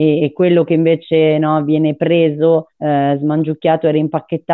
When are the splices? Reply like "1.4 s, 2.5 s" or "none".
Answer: 2.7 s